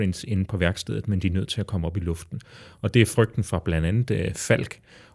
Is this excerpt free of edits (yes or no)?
yes